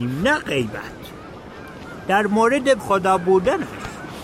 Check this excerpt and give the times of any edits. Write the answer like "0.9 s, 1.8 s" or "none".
2.8 s